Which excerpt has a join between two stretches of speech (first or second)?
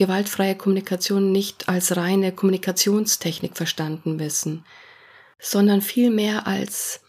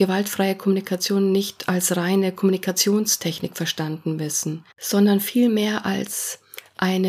second